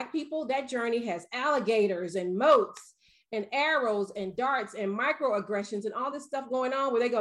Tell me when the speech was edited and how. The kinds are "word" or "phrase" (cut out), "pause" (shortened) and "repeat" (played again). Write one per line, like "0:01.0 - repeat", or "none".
none